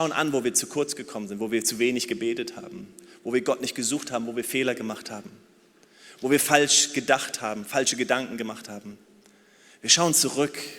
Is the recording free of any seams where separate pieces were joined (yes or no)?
yes